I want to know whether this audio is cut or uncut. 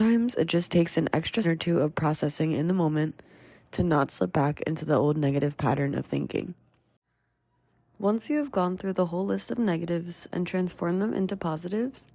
cut